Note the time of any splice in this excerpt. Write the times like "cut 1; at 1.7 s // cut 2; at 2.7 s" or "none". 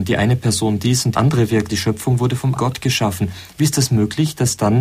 cut 1; at 1.1 s // cut 2; at 1.7 s // cut 3; at 2.6 s